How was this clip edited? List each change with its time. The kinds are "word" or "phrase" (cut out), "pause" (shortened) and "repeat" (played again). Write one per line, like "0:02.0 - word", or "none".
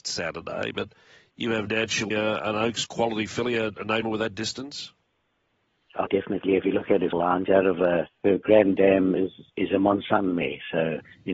0:01.7 - word
0:02.1 - word
0:04.0 - word
0:06.1 - word
0:07.1 - word
0:07.5 - word
0:08.1 - word
0:09.5 - word